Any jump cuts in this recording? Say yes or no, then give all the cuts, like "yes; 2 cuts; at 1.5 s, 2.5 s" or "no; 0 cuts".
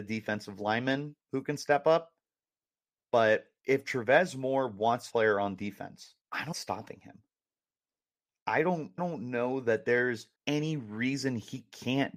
yes; 6 cuts; at 3.6 s, 5.1 s, 6.2 s, 6.5 s, 9.0 s, 10.4 s